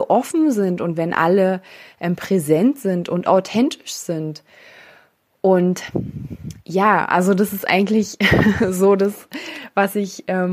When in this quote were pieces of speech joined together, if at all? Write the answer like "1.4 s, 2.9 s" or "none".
none